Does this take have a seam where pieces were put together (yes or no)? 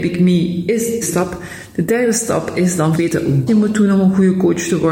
yes